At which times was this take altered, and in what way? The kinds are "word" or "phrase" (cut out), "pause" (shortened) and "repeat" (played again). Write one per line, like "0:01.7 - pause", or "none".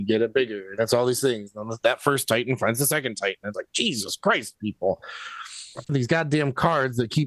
0:03.5 - word
0:05.9 - phrase

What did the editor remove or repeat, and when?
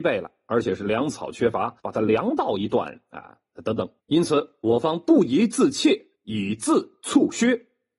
0:01.8 - pause
0:04.0 - pause
0:06.2 - pause

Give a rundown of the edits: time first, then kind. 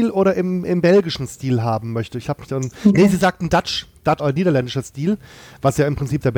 0:04.2 - word

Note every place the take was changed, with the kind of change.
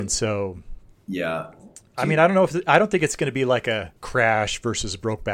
0:04.0 - pause

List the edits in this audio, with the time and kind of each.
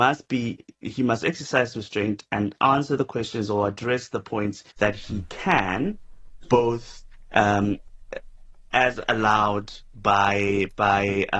0:04.7 - pause

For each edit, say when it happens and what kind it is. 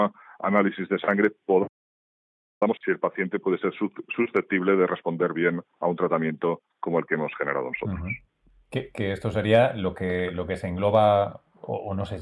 0:02.8 - word

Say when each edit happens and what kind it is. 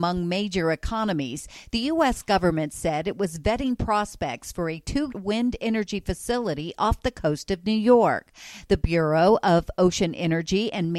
0:05.1 - word

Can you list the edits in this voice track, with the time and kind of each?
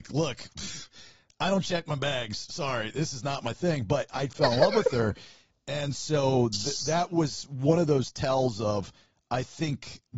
none

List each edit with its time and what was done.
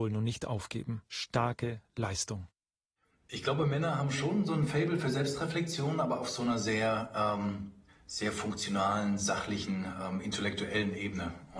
0:01.1 - pause
0:07.9 - pause

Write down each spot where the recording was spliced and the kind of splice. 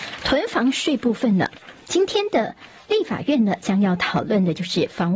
0:02.8 - pause

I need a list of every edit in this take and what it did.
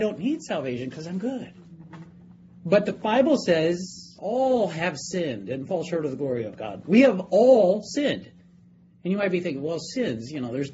none

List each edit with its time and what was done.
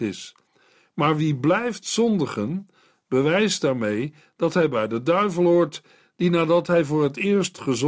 none

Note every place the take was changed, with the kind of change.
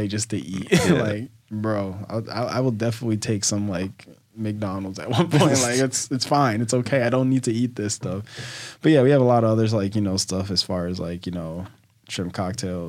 none

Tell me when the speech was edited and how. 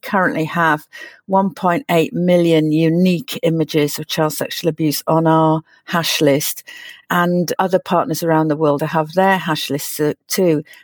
0:08.8 - word

